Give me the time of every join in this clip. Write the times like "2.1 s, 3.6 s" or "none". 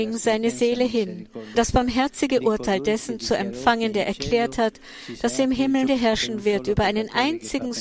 1.5 s, 5.9 s